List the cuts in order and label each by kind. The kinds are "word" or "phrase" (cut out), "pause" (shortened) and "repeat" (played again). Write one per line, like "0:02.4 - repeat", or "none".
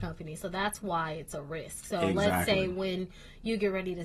none